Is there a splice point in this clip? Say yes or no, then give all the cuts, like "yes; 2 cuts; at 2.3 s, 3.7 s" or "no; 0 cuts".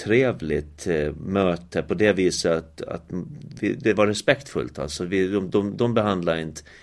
no; 0 cuts